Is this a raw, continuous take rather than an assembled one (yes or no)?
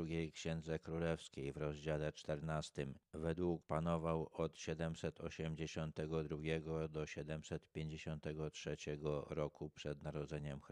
no